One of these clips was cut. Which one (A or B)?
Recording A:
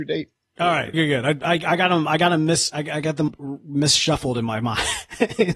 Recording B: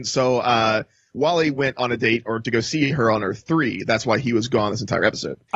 A